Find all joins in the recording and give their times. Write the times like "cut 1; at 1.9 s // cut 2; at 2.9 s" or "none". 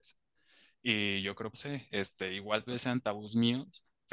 cut 1; at 1.5 s // cut 2; at 2.7 s